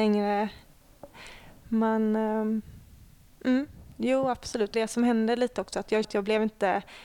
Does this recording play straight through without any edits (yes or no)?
no